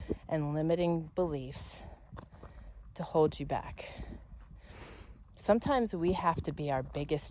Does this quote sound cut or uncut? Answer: uncut